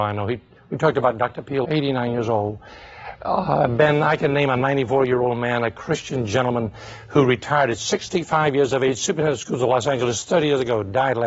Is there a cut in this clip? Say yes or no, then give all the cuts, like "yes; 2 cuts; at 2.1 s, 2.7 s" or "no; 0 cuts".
yes; 1 cut; at 1.6 s